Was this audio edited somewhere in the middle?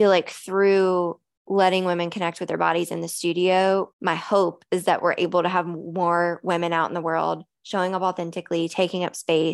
no; 0 cuts

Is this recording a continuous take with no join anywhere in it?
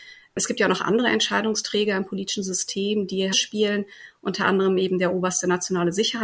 no; 1 cut; at 3.3 s

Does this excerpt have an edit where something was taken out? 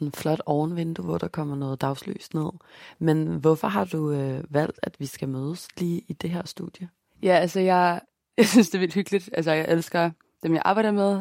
no; 0 cuts

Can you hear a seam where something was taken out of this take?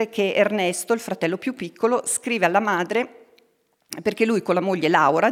no; 0 cuts

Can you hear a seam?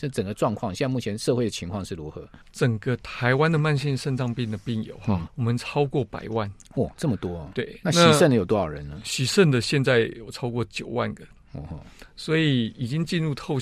yes; 2 cuts; at 2.4 s, 5.3 s

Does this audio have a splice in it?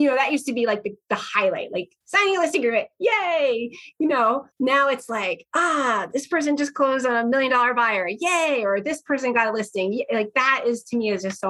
yes; 2 cuts; at 2.0 s, 4.5 s

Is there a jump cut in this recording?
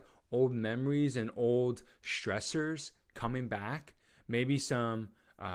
no; 0 cuts

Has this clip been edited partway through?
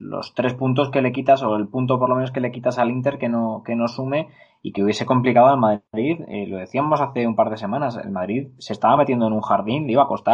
no; 0 cuts

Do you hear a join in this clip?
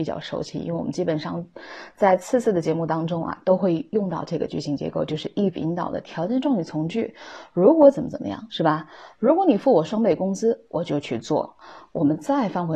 no; 0 cuts

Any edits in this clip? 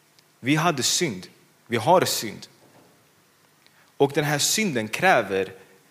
no; 0 cuts

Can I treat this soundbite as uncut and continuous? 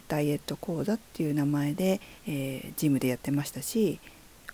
no; 1 cut; at 2.2 s

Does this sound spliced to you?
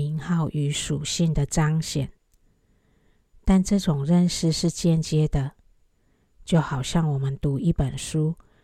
no; 0 cuts

